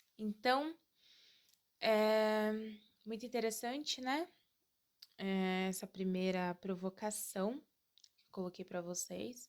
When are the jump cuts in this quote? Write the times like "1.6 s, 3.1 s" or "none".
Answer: none